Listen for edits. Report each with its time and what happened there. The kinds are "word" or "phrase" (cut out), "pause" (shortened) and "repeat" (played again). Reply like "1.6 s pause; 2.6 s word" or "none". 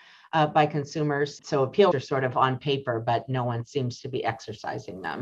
1.9 s word